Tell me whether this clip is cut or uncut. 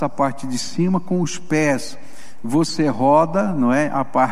uncut